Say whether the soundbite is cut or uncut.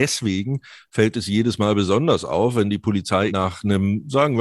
cut